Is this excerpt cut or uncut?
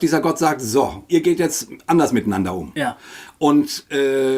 cut